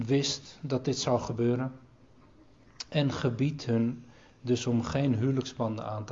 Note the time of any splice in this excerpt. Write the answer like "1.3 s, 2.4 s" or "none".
none

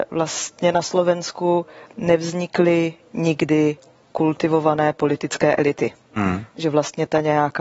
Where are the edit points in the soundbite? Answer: none

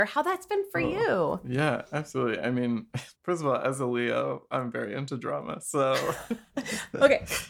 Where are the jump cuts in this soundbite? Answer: 3.1 s

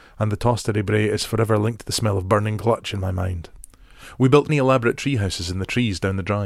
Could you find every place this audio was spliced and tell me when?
4.5 s

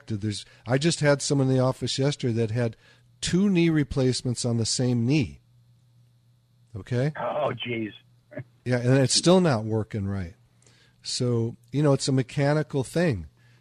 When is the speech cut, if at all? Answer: none

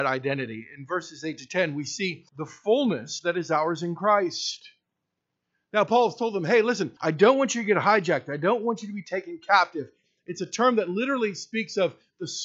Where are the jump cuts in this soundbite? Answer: 2.3 s, 7.0 s

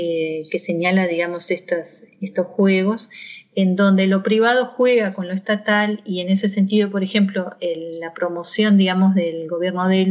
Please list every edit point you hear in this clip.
none

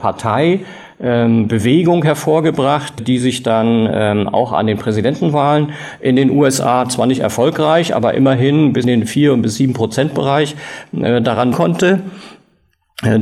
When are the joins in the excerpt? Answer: 3.0 s, 8.8 s, 11.5 s

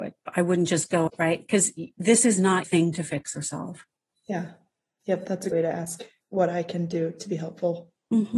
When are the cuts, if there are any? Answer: 1.1 s, 2.6 s, 5.5 s, 6.2 s

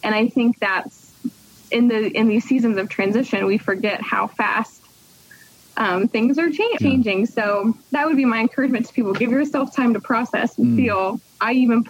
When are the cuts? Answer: 6.8 s

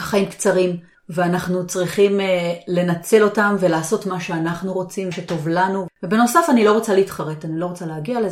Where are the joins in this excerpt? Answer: 0.9 s, 5.1 s

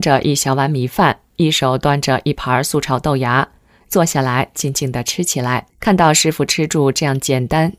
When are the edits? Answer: 5.7 s

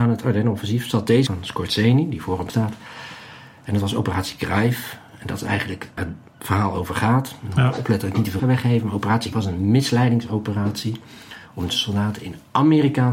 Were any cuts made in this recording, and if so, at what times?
1.3 s, 2.5 s, 6.0 s, 8.4 s, 9.3 s, 11.7 s

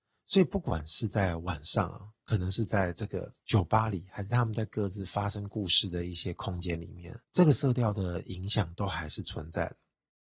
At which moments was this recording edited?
3.4 s, 7.2 s

